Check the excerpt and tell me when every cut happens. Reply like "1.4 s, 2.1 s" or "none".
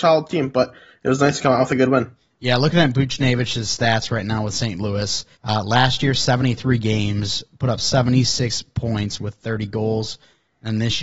5.3 s